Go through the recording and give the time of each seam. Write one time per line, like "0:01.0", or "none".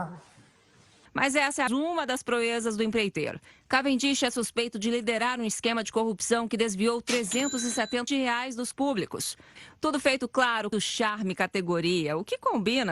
0:01.7
0:08.1
0:08.7
0:10.7